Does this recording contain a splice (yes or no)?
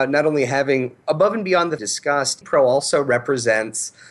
yes